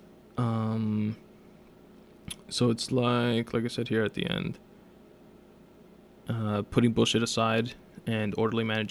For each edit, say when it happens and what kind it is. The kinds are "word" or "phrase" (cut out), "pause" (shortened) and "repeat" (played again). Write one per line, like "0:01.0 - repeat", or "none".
0:02.4 - pause